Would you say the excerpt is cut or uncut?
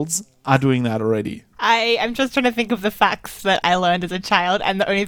cut